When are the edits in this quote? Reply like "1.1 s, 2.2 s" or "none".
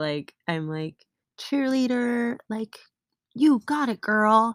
none